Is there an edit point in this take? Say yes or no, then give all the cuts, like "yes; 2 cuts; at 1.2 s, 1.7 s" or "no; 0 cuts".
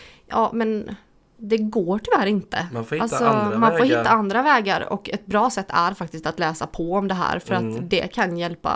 no; 0 cuts